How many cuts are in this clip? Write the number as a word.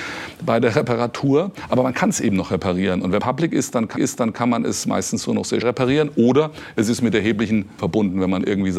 four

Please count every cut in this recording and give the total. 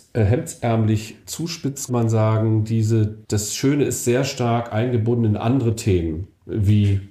two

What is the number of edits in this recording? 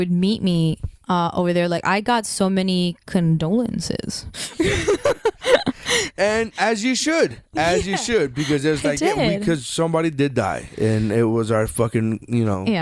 zero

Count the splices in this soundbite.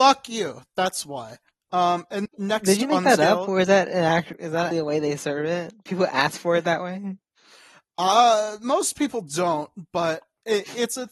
two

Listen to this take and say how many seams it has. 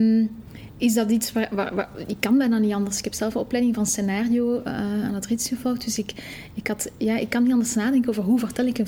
zero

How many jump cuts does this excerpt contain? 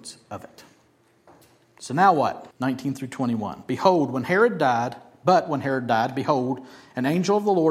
one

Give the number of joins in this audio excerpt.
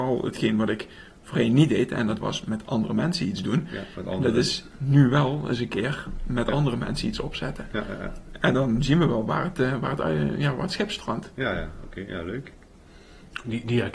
zero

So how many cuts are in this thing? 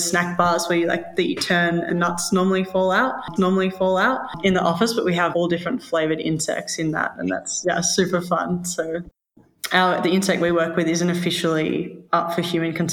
three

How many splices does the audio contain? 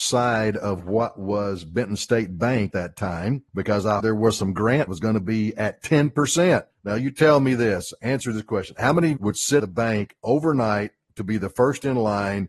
seven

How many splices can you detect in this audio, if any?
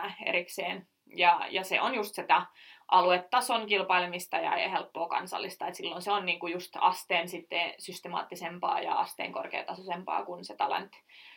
zero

